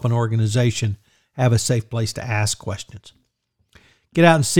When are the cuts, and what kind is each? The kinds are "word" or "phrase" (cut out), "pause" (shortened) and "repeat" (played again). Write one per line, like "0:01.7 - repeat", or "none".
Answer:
none